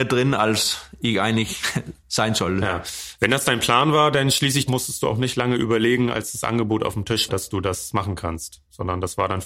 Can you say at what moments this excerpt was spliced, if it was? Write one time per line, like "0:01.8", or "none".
0:02.0
0:04.7
0:07.3